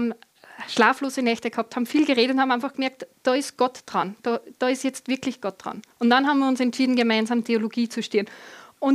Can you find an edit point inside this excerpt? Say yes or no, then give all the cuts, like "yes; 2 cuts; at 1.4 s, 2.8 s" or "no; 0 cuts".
yes; 2 cuts; at 3.1 s, 5.9 s